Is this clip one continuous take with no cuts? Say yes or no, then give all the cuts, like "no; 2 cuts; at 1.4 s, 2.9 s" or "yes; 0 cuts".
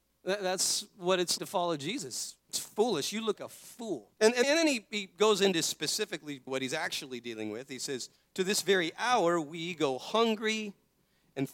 no; 7 cuts; at 1.4 s, 2.4 s, 3.4 s, 4.1 s, 4.4 s, 6.5 s, 8.2 s